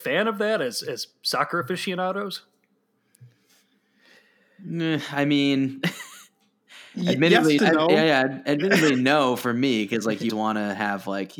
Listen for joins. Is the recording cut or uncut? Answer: cut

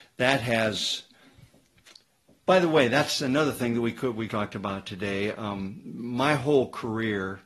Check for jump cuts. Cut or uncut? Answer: cut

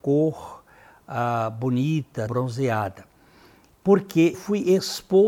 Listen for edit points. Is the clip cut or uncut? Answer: cut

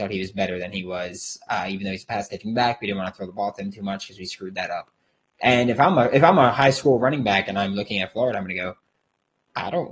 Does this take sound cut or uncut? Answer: uncut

